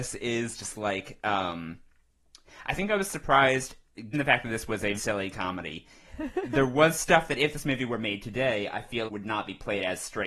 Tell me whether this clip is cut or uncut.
cut